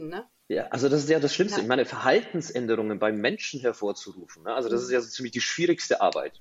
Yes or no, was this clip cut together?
no